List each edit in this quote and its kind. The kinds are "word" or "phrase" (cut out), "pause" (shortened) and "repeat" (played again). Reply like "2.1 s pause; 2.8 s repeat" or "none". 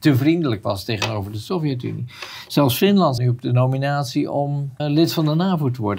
3.2 s word; 4.8 s word